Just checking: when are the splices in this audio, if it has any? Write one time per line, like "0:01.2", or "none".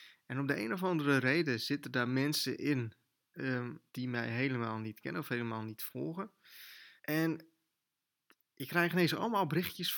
0:03.9
0:07.0